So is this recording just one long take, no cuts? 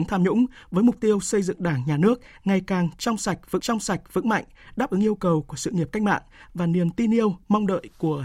no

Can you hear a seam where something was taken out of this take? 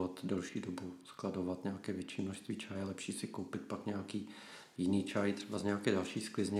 no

